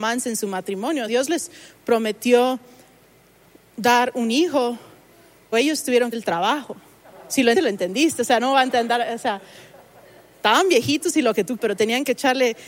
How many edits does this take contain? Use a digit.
5